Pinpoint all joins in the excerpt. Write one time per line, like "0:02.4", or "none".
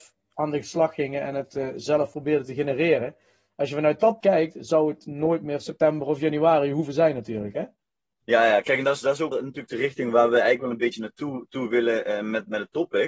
0:04.2
0:09.3